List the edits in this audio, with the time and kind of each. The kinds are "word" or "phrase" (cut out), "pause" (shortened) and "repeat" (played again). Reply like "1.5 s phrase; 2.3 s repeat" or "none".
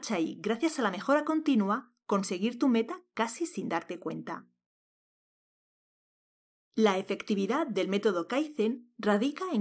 none